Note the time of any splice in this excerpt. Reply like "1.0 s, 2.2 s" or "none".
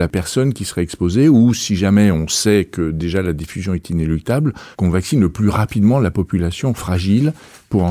4.7 s

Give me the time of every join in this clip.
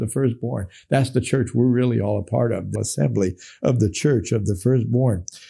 2.8 s

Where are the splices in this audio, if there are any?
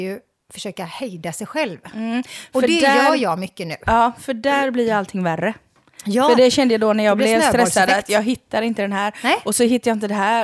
none

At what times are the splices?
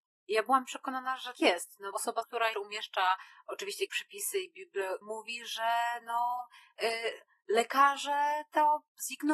1.3 s, 1.9 s, 2.2 s, 2.5 s, 3.9 s, 5.0 s

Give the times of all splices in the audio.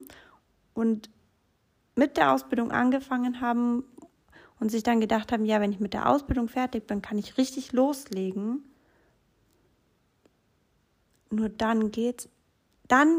none

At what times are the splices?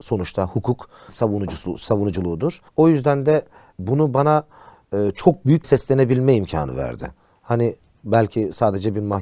1.1 s, 2.7 s, 5.6 s

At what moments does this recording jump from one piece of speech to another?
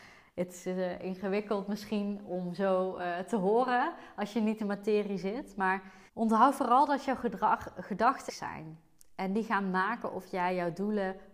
4.6 s, 6.1 s, 8.3 s

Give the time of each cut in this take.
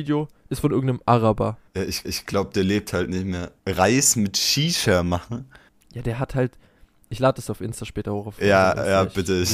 1.7 s, 2.0 s, 3.6 s, 5.7 s

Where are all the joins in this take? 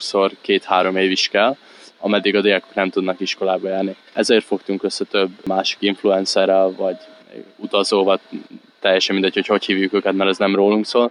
none

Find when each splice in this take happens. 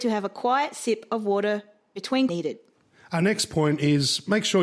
2.3 s

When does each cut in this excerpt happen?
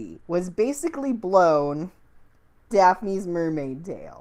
2.7 s

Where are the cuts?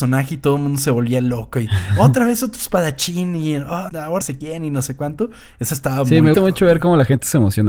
3.9 s, 4.2 s, 6.3 s

